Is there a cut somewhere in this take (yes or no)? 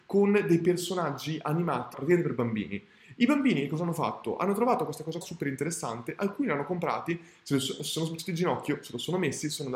yes